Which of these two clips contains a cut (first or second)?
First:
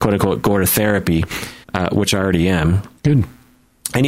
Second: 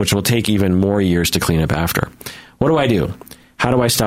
first